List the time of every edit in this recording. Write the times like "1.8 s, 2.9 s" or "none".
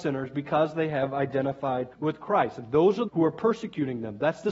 1.9 s, 3.1 s